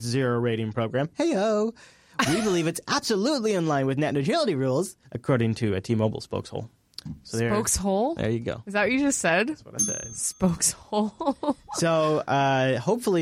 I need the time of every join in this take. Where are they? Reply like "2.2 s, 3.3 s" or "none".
5.0 s